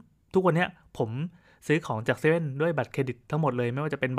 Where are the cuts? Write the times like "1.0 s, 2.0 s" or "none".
none